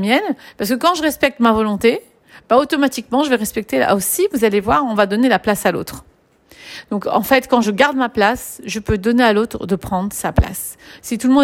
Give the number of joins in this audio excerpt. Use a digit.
0